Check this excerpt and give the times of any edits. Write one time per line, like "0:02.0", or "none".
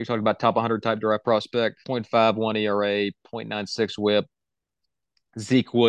0:01.8